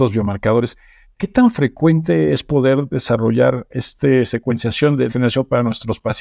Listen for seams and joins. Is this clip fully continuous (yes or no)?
no